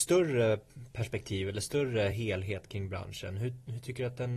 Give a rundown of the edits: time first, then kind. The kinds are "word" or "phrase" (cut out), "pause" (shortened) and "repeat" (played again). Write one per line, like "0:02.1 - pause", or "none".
none